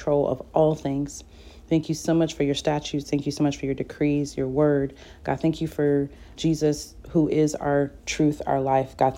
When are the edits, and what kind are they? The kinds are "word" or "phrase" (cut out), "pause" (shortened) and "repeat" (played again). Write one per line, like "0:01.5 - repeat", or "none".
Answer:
0:06.4 - word